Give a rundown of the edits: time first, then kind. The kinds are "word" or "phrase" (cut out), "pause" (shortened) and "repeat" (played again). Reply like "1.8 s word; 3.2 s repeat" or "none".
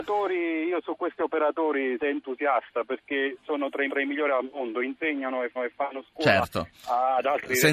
2.0 s phrase; 3.9 s repeat; 5.6 s repeat